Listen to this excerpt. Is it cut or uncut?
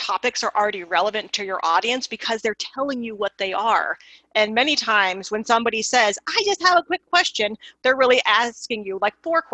uncut